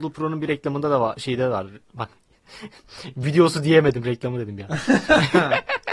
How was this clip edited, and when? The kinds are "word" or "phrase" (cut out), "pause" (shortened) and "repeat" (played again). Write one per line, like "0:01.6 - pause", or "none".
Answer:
none